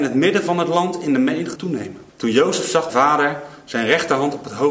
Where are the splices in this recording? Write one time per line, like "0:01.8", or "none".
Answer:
0:01.6
0:02.1
0:02.9